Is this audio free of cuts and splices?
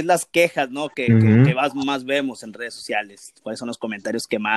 yes; 0 cuts

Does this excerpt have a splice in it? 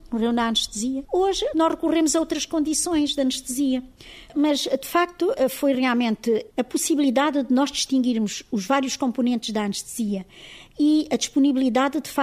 no; 0 cuts

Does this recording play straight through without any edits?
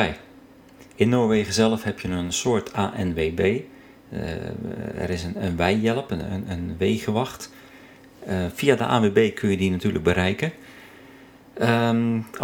yes; 0 cuts

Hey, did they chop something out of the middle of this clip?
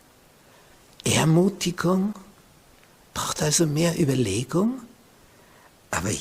no; 0 cuts

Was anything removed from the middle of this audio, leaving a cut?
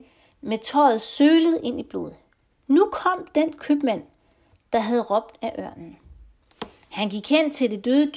no; 0 cuts

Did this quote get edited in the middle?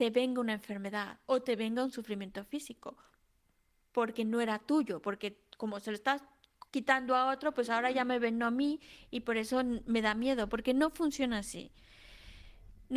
yes; 1 cut; at 6.7 s

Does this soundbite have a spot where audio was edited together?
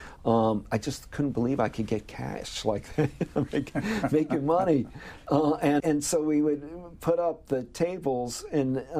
yes; 1 cut; at 5.8 s

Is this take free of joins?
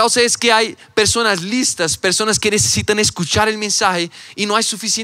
yes; 0 cuts

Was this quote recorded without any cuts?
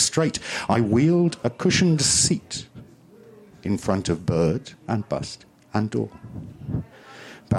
yes; 0 cuts

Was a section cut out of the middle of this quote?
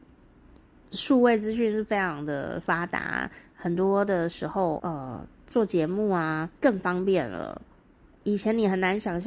yes; 2 cuts; at 4.8 s, 6.5 s

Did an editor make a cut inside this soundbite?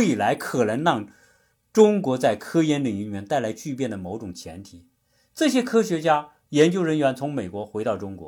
no; 0 cuts

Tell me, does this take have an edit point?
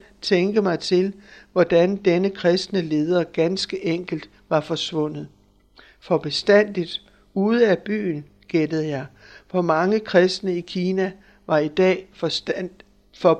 no; 0 cuts

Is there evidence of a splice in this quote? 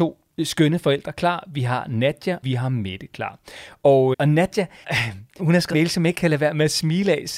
yes; 6 cuts; at 2.4 s, 4.1 s, 4.8 s, 5.4 s, 5.7 s, 6.1 s

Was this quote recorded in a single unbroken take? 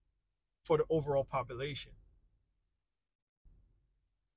yes; 0 cuts

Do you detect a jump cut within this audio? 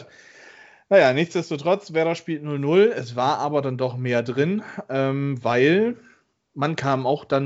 no; 0 cuts

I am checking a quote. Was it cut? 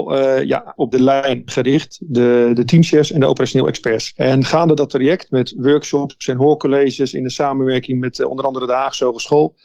no; 0 cuts

